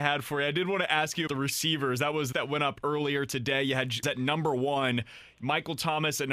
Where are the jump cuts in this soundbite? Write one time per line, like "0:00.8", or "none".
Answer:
0:01.3
0:02.3
0:04.0